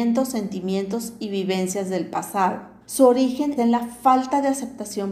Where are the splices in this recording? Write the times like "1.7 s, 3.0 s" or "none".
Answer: 2.8 s, 3.6 s